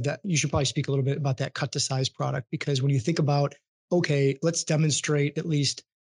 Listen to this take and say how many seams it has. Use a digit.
0